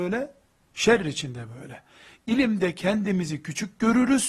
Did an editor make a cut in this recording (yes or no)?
no